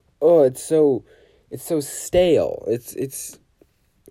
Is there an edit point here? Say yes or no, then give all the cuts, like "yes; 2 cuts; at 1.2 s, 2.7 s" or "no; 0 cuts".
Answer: no; 0 cuts